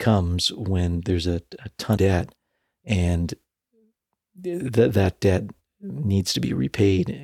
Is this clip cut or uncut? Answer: cut